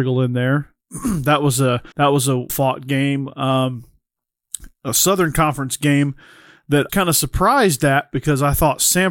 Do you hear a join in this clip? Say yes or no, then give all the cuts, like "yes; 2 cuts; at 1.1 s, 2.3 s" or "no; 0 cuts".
yes; 3 cuts; at 1.9 s, 2.5 s, 6.9 s